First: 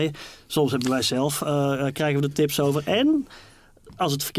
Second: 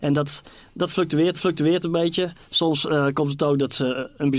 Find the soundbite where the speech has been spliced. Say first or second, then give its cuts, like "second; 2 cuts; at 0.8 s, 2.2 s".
second; 1 cut; at 1.3 s